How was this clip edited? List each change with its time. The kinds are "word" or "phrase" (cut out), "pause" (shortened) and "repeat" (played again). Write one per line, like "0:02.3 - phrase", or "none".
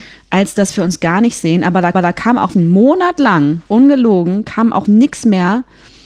0:01.9 - repeat
0:02.5 - word
0:03.7 - pause
0:04.9 - word